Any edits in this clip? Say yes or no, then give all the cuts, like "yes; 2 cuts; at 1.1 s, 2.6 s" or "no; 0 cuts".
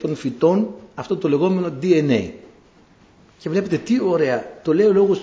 no; 0 cuts